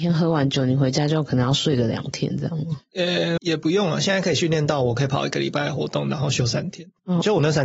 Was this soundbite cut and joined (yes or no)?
yes